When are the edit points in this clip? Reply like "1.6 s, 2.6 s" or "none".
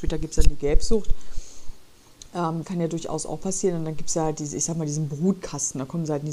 2.6 s